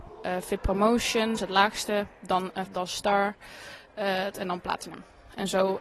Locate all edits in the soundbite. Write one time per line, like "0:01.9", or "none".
0:01.4
0:02.7
0:04.3